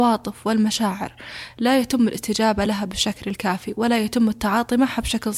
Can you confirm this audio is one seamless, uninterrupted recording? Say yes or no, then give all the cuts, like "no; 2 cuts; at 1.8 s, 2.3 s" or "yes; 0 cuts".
yes; 0 cuts